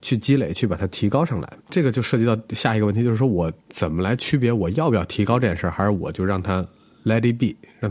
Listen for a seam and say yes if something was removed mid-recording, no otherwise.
yes